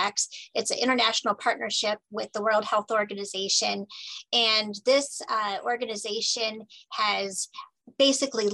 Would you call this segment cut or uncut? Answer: uncut